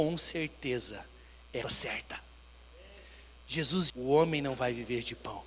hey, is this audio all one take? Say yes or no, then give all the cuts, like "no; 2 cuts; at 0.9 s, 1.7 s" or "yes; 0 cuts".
no; 2 cuts; at 1.6 s, 3.9 s